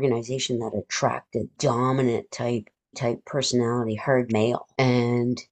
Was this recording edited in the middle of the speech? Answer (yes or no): yes